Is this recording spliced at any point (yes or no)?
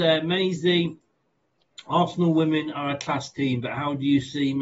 no